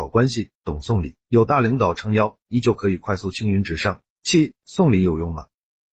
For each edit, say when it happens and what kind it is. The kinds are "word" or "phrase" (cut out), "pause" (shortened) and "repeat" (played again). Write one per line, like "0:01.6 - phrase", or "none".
0:01.2 - pause
0:04.1 - pause